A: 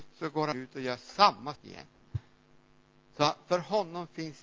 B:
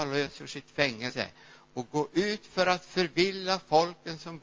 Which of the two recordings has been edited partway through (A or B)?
A